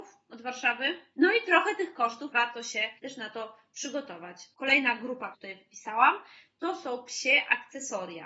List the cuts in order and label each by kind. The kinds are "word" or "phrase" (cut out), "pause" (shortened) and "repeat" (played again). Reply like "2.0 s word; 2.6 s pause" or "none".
2.3 s phrase; 3.0 s pause; 5.3 s phrase

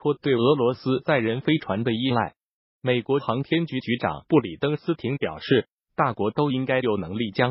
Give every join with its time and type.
none

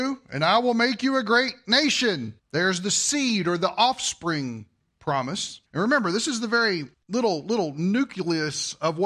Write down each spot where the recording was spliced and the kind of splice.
2.4 s pause; 5.7 s pause; 6.9 s pause

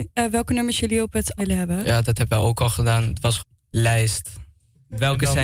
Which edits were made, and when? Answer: 1.4 s word; 3.4 s word

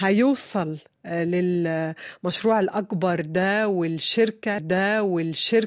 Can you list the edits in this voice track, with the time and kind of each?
4.6 s repeat

